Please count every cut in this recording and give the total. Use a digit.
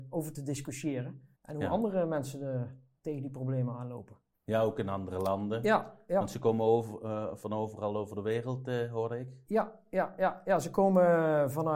1